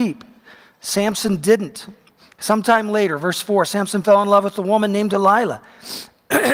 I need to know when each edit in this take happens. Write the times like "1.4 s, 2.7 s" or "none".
none